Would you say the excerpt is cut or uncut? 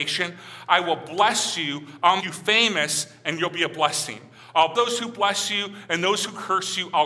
cut